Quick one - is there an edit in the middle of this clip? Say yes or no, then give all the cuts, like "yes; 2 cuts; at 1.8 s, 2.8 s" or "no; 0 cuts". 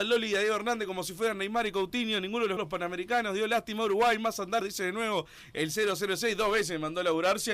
yes; 2 cuts; at 2.6 s, 4.6 s